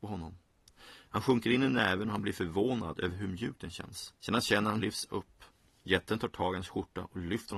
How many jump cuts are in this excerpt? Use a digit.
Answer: 2